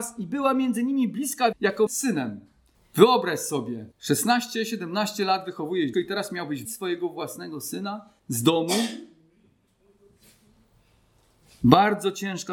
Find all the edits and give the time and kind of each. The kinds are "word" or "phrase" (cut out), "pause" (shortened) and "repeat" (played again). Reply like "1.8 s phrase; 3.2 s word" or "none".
1.5 s word; 1.9 s phrase; 2.7 s pause; 3.9 s pause; 5.9 s word; 6.6 s word; 8.2 s pause